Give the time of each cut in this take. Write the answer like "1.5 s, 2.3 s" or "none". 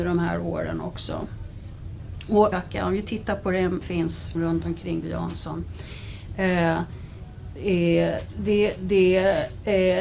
2.5 s, 3.8 s, 4.3 s, 5.0 s